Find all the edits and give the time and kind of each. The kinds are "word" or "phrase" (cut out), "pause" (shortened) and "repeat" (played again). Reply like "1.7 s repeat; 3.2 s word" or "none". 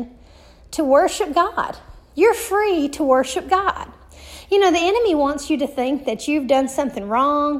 none